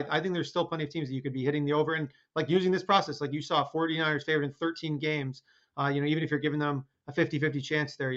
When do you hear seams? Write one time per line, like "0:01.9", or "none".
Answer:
none